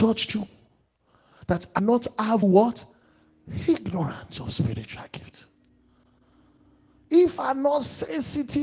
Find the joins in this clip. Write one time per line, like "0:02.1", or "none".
0:01.8
0:02.4
0:07.4